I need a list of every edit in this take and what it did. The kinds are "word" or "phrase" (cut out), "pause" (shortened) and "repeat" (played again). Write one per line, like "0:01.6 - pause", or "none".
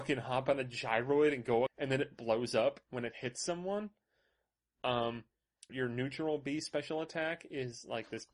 0:01.7 - phrase
0:05.7 - word